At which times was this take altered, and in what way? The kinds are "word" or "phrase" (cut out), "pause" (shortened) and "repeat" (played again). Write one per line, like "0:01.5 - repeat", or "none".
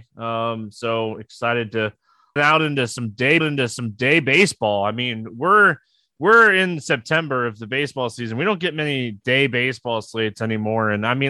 0:02.4 - phrase
0:03.4 - repeat

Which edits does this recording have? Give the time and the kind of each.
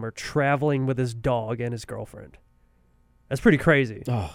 none

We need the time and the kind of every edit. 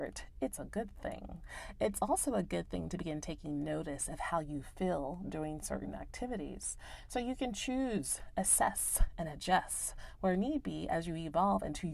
none

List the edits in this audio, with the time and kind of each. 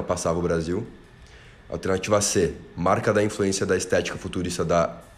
none

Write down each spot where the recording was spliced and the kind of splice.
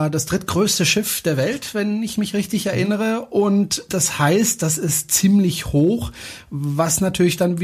none

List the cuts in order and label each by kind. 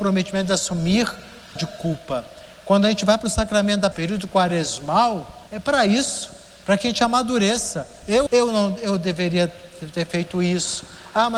0:01.6 - phrase
0:03.9 - word
0:05.5 - pause
0:08.3 - phrase

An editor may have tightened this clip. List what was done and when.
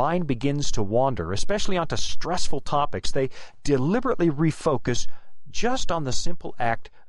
none

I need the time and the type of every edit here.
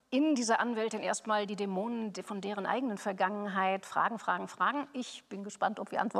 none

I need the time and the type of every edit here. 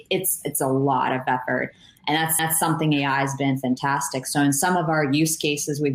0:02.4 - repeat

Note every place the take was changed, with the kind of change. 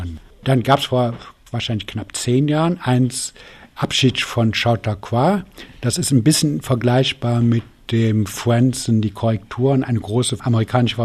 none

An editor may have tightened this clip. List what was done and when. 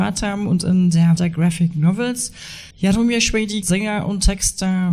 0:01.2 - word
0:02.7 - pause
0:03.6 - word

